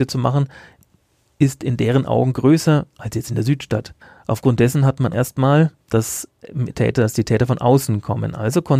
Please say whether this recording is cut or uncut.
cut